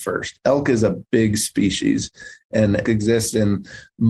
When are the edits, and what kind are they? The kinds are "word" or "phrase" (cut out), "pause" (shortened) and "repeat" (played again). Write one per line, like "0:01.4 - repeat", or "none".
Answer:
0:02.9 - word